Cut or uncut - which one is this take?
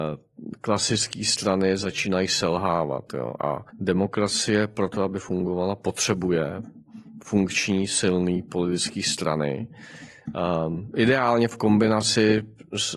cut